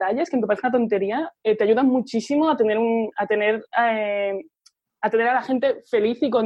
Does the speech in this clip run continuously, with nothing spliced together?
yes; 0 cuts

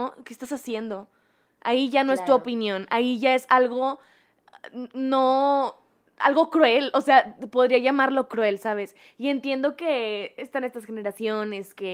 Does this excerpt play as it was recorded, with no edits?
yes; 0 cuts

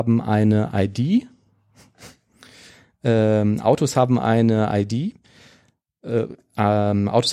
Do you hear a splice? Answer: no; 0 cuts

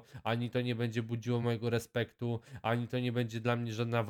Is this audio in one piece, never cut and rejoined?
yes; 0 cuts

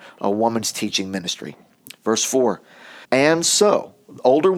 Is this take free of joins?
no; 1 cut; at 3.0 s

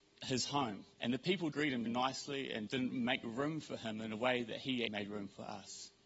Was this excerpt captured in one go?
no; 5 cuts; at 0.9 s, 1.5 s, 1.9 s, 2.7 s, 4.9 s

